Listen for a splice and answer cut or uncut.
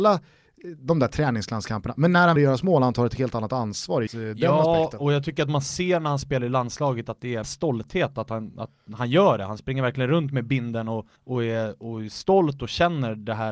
cut